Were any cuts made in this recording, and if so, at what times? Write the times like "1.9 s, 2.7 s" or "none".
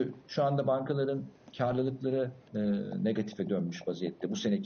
2.5 s